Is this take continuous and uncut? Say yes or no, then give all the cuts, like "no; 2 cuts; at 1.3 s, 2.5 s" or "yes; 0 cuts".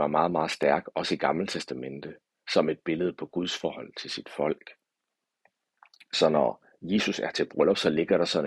yes; 0 cuts